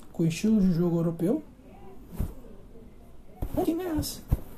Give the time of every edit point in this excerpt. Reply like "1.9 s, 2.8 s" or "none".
3.6 s